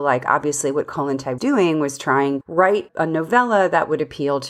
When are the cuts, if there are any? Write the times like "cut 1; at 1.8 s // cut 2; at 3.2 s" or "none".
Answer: cut 1; at 1.4 s // cut 2; at 2.4 s // cut 3; at 2.9 s